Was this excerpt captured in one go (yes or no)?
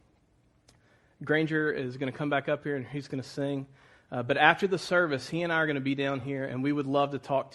yes